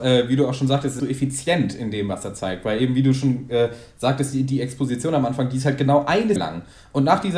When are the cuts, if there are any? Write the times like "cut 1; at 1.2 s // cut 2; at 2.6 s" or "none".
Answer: cut 1; at 1.0 s // cut 2; at 6.4 s